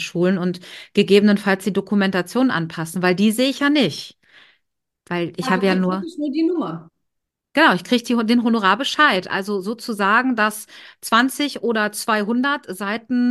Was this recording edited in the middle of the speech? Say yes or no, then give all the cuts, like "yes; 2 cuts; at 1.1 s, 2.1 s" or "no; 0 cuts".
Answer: no; 0 cuts